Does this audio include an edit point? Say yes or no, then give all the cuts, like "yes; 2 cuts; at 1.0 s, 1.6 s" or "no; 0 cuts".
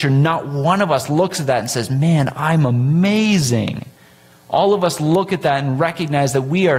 no; 0 cuts